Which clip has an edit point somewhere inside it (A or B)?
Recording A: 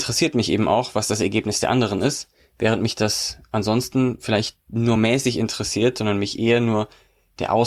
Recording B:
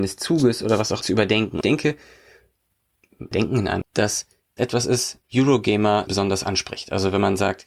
B